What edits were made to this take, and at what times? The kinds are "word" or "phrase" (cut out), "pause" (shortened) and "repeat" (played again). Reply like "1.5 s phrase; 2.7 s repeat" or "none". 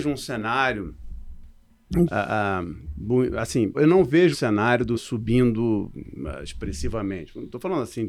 2.1 s word; 3.7 s word; 4.3 s word; 4.9 s word